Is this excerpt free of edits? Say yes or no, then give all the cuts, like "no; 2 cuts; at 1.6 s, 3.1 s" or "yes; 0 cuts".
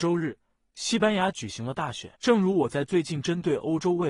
no; 1 cut; at 2.2 s